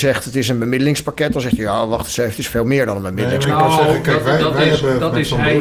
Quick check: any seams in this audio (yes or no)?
no